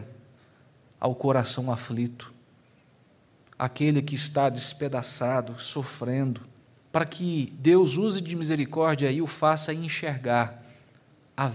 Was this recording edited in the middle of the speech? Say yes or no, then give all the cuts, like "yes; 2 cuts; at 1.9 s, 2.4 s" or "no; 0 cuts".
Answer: yes; 1 cut; at 6.6 s